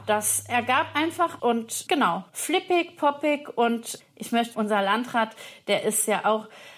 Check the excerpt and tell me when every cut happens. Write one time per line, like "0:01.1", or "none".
0:01.4
0:01.9
0:02.3
0:04.0
0:04.5